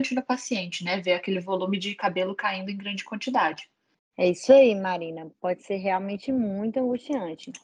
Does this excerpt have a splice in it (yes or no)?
no